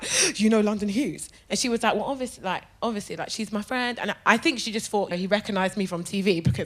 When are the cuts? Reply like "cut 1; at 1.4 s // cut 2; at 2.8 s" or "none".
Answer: cut 1; at 5.1 s